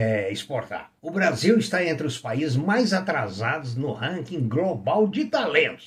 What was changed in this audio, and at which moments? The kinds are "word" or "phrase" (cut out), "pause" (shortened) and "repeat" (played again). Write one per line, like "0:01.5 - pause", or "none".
0:01.0 - pause